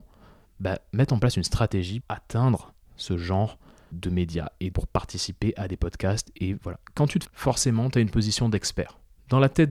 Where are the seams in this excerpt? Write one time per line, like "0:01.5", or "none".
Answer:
0:02.0
0:03.9
0:04.7
0:07.2